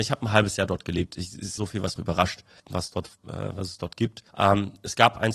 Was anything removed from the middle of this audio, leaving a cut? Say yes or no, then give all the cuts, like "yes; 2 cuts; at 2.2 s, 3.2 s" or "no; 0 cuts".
yes; 4 cuts; at 1.6 s, 2.0 s, 2.6 s, 4.3 s